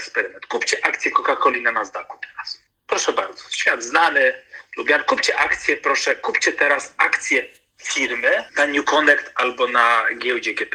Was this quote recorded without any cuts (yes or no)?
yes